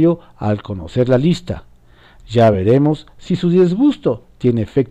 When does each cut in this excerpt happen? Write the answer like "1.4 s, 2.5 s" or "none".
none